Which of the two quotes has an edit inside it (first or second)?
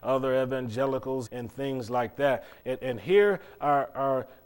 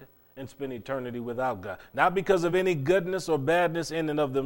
first